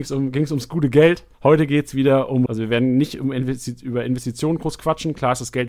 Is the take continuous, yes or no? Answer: no